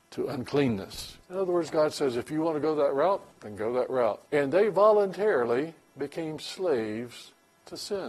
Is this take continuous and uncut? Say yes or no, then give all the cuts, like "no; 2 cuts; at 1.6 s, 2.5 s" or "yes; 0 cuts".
no; 3 cuts; at 1.2 s, 3.3 s, 4.3 s